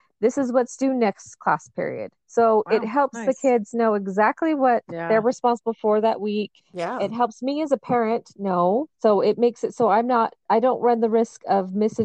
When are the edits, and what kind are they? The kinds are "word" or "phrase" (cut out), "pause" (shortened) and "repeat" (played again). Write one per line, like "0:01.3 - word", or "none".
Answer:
0:06.6 - pause
0:08.9 - pause
0:10.4 - pause